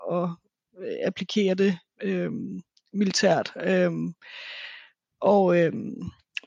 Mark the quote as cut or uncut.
uncut